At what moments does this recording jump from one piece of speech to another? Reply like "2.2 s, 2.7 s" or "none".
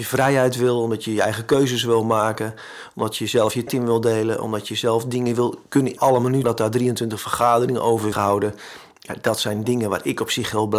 3.7 s, 6.0 s, 6.4 s, 8.1 s